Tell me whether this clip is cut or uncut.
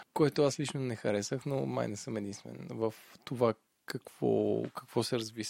uncut